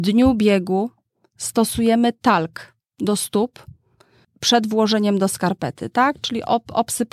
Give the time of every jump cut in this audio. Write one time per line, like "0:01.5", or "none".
none

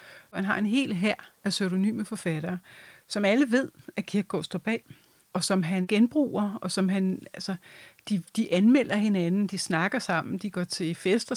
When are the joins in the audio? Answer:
none

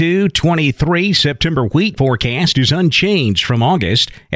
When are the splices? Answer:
0:02.0

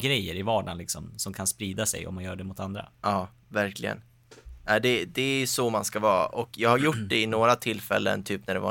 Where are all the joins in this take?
0:02.9

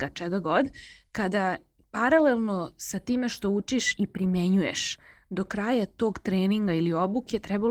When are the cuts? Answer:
none

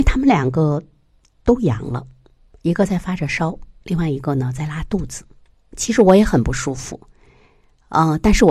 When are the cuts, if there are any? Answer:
none

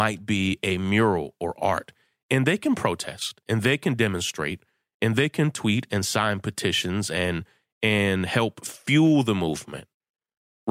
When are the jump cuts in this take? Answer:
none

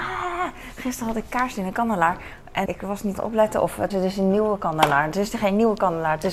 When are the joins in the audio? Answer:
0:02.7
0:03.2
0:03.9

